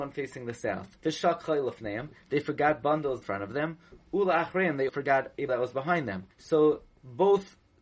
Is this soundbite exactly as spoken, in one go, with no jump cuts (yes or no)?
no